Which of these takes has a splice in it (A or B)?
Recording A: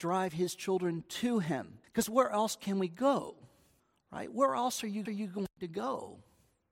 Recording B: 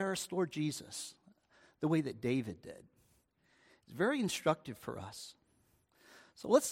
A